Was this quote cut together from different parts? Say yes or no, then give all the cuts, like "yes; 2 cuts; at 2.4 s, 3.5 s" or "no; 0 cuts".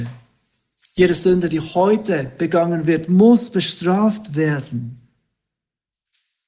no; 0 cuts